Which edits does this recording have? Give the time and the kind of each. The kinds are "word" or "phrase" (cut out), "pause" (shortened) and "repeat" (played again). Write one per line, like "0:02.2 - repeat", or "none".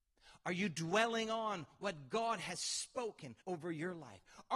0:03.4 - pause